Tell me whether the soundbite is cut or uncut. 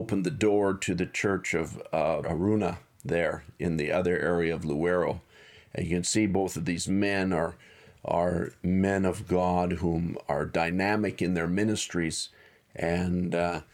cut